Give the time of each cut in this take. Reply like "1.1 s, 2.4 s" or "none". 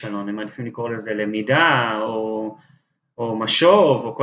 none